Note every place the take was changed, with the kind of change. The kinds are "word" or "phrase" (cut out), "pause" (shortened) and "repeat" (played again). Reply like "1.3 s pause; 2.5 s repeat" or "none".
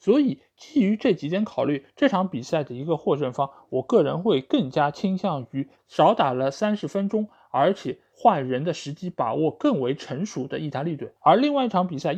11.2 s pause